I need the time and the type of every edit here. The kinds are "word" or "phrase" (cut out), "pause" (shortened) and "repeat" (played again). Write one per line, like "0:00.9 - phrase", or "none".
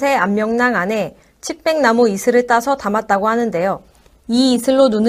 none